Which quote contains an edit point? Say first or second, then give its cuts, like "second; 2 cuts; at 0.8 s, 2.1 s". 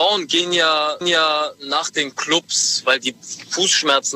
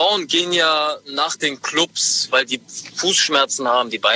first; 1 cut; at 1.0 s